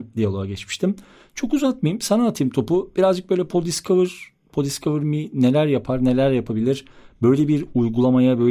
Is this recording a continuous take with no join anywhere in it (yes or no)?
yes